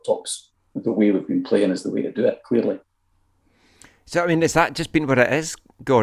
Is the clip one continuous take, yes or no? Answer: yes